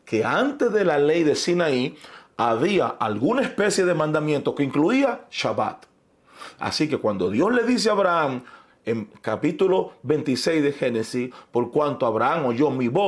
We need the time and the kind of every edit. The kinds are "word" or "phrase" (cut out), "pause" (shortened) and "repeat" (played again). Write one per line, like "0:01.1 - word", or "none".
none